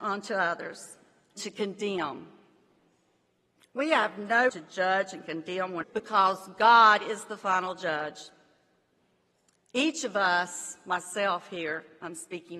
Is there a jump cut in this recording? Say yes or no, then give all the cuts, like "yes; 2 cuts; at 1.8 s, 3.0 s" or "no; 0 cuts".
yes; 3 cuts; at 1.4 s, 4.5 s, 5.8 s